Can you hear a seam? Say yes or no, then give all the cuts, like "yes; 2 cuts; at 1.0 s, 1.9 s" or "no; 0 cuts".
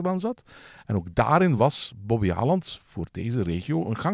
no; 0 cuts